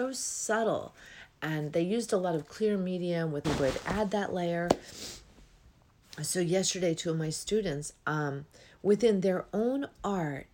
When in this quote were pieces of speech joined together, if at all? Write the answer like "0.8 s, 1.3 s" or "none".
3.4 s